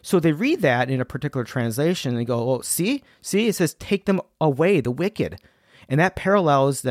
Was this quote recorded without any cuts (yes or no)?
yes